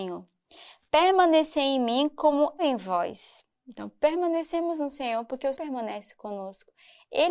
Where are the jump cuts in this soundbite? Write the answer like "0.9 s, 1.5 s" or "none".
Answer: 2.6 s, 5.5 s